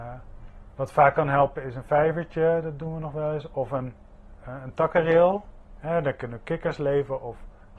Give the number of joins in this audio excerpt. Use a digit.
0